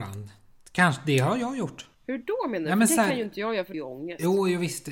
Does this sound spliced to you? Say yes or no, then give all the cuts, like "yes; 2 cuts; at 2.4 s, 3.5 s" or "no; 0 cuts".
yes; 2 cuts; at 1.9 s, 3.7 s